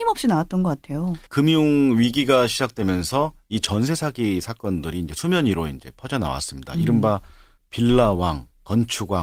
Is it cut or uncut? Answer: cut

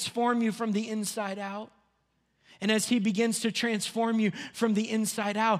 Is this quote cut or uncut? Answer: uncut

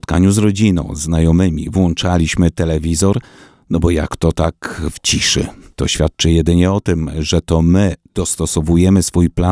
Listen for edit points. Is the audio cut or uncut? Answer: uncut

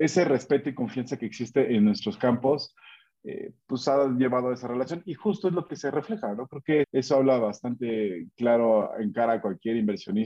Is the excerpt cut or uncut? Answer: cut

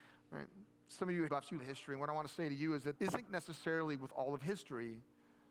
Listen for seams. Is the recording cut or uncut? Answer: cut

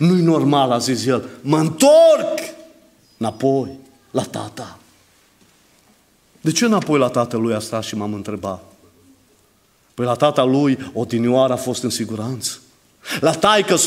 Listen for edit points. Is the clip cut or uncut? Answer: uncut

